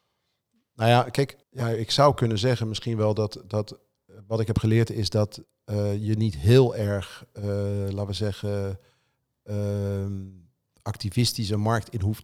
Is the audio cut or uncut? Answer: cut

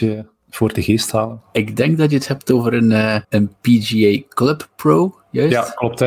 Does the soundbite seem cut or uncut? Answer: cut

